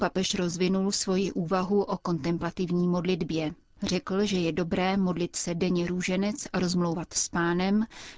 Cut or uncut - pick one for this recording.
uncut